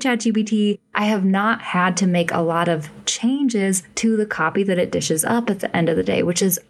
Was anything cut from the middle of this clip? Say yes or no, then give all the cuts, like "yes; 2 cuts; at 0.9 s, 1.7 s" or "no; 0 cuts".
no; 0 cuts